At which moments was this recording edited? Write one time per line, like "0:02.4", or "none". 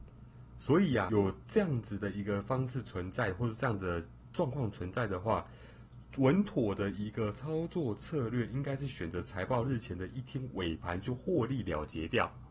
0:01.1